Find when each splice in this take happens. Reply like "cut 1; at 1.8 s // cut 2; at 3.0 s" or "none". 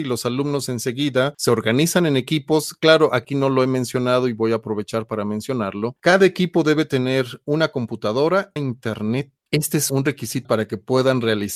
cut 1; at 8.6 s // cut 2; at 10.4 s